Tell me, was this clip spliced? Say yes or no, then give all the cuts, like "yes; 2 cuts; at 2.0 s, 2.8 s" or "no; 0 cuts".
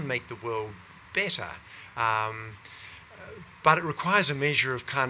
no; 0 cuts